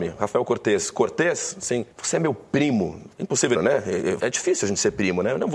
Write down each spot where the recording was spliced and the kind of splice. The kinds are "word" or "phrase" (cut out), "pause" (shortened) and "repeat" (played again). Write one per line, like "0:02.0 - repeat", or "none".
0:01.9 - pause
0:03.1 - pause
0:03.5 - phrase
0:04.2 - word